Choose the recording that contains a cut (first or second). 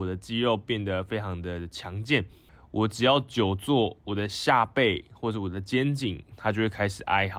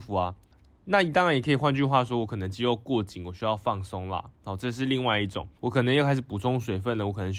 second